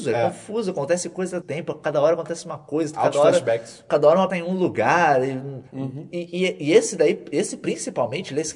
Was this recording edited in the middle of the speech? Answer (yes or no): yes